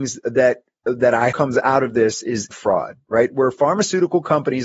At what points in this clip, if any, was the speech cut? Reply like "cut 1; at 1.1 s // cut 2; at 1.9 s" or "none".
cut 1; at 1.3 s // cut 2; at 2.5 s